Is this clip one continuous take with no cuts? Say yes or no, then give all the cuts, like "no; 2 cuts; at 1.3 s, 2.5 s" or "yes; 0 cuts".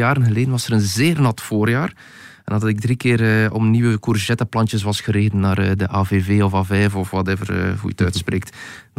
yes; 0 cuts